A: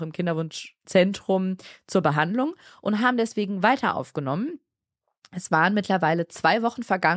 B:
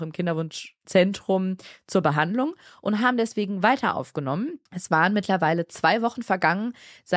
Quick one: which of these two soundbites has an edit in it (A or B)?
B